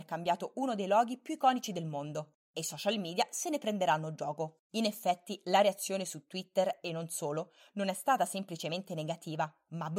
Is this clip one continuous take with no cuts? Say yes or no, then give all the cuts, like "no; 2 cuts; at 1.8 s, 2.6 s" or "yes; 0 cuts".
no; 2 cuts; at 2.4 s, 4.7 s